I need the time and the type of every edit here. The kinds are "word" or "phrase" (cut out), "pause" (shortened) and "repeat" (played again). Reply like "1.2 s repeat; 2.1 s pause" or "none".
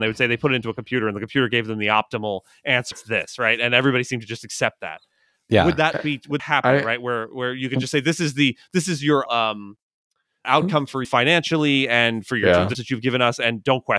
2.9 s word; 6.4 s word; 9.3 s word; 10.4 s word; 11.0 s word; 12.7 s word